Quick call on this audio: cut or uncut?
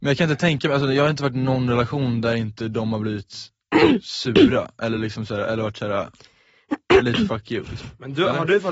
uncut